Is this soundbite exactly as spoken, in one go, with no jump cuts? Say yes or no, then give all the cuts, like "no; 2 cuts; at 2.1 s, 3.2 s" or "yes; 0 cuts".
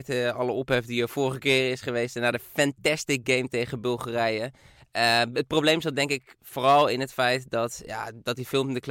yes; 0 cuts